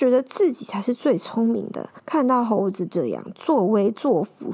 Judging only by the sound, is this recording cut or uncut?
cut